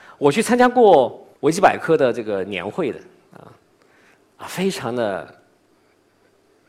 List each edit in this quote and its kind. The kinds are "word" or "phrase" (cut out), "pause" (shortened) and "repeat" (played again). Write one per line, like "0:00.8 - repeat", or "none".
0:01.4 - pause